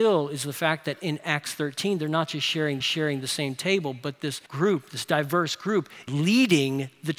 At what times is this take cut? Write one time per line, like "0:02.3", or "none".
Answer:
0:02.8
0:04.5
0:06.1